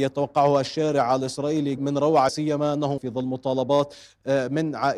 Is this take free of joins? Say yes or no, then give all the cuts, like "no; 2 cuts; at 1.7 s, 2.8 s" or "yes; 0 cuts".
no; 3 cuts; at 1.8 s, 2.3 s, 3.0 s